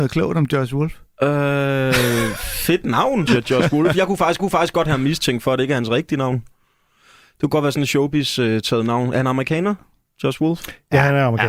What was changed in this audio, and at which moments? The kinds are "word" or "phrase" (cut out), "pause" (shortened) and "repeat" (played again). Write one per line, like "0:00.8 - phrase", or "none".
0:03.3 - word
0:04.4 - repeat